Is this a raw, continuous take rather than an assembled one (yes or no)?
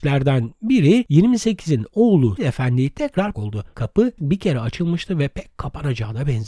no